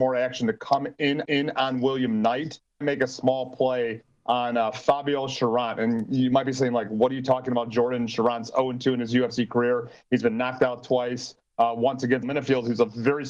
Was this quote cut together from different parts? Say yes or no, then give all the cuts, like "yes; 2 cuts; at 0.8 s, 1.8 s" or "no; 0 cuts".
yes; 3 cuts; at 1.2 s, 2.8 s, 12.2 s